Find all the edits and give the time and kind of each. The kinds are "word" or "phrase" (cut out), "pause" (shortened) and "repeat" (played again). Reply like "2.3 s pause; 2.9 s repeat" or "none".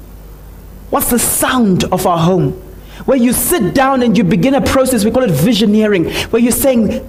none